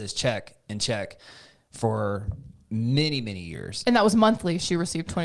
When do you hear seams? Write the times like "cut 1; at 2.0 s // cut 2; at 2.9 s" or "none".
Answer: none